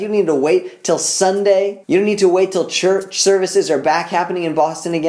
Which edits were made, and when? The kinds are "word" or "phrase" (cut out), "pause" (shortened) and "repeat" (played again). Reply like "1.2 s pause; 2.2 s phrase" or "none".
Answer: 1.8 s pause